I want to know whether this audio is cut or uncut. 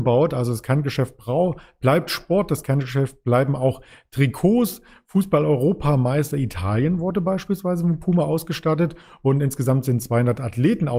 uncut